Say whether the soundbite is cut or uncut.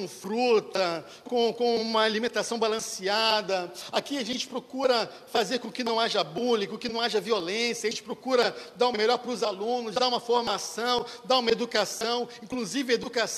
uncut